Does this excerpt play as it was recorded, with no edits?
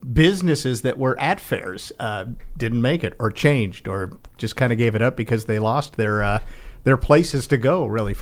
yes; 0 cuts

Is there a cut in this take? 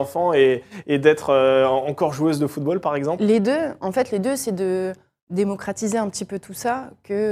no; 0 cuts

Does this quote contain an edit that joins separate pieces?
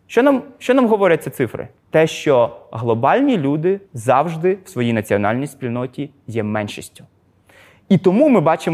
yes; 2 cuts; at 1.8 s, 3.9 s

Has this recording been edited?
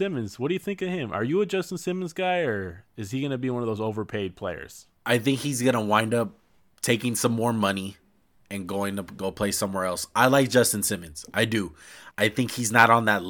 no; 0 cuts

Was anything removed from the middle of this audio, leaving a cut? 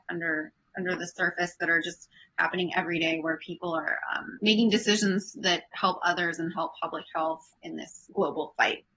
no; 0 cuts

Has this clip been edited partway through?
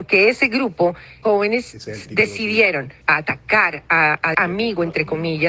yes; 3 cuts; at 1.2 s, 3.0 s, 4.3 s

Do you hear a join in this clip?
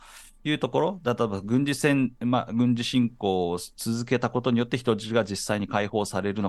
no; 0 cuts

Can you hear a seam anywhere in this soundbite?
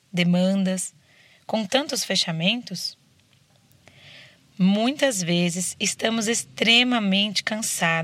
no; 0 cuts

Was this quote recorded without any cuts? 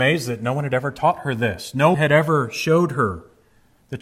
no; 1 cut; at 1.9 s

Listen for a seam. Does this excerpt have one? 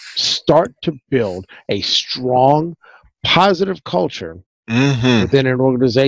no; 0 cuts

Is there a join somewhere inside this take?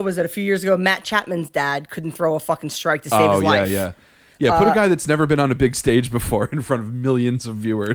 no; 0 cuts

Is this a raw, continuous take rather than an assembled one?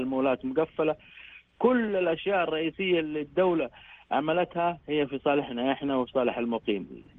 yes; 0 cuts

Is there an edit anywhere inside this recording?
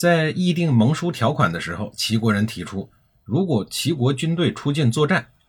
no; 0 cuts

